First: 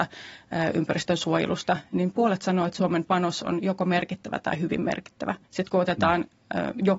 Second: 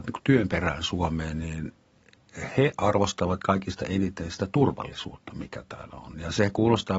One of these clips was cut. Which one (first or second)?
first